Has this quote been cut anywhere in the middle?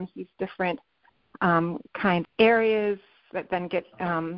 yes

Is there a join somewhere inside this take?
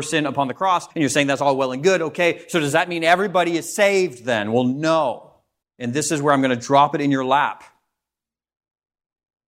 yes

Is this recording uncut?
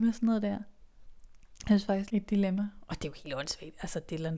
no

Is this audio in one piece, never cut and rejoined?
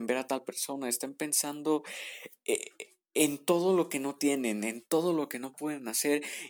yes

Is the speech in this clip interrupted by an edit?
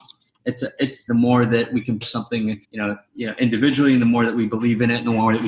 yes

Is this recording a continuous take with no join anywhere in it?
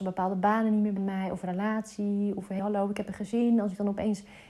no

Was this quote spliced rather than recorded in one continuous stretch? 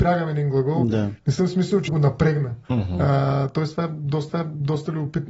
yes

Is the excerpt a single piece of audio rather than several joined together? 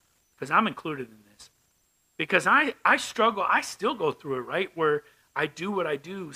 yes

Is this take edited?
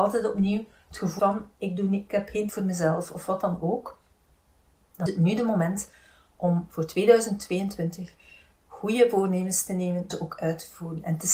yes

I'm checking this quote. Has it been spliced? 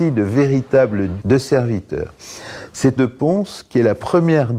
yes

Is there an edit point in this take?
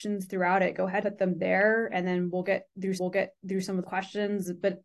yes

